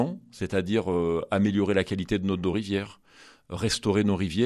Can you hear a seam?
no; 0 cuts

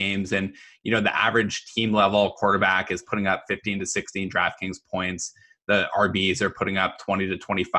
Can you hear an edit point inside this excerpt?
no; 0 cuts

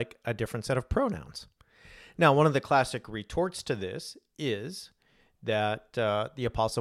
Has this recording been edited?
no; 0 cuts

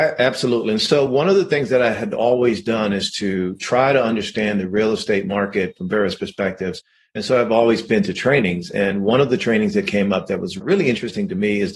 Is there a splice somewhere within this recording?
no; 0 cuts

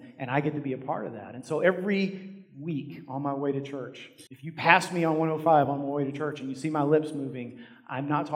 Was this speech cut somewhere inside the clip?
yes; 1 cut; at 4.3 s

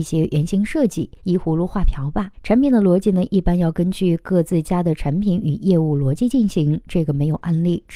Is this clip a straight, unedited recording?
no; 2 cuts; at 1.2 s, 2.3 s

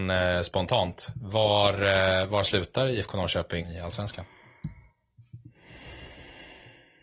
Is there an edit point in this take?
yes; 1 cut; at 3.6 s

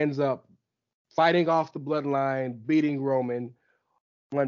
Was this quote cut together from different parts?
no; 0 cuts

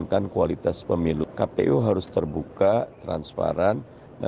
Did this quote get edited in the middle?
no; 0 cuts

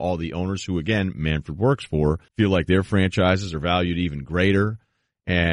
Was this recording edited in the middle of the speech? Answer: yes; 1 cut; at 2.3 s

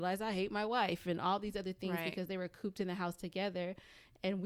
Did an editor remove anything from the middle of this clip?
no; 0 cuts

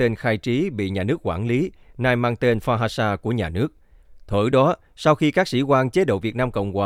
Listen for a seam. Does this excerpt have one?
no; 0 cuts

